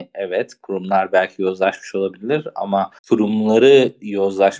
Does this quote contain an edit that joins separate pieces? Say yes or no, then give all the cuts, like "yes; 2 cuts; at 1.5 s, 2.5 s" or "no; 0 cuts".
yes; 1 cut; at 3.0 s